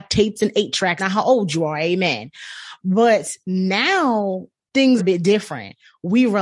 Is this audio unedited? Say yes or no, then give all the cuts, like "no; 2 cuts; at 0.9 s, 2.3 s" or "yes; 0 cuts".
no; 2 cuts; at 1.0 s, 5.0 s